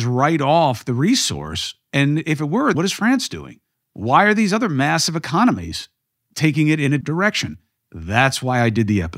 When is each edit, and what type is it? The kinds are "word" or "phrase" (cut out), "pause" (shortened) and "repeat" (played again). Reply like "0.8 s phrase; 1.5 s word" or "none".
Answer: 2.7 s word; 3.7 s pause; 7.0 s word